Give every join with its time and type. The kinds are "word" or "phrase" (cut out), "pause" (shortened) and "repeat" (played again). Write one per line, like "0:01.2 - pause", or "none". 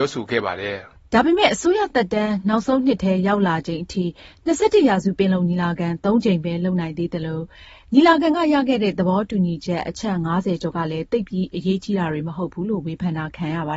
none